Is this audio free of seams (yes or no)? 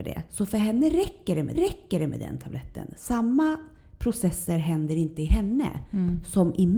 no